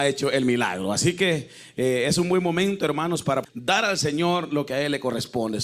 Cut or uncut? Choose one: cut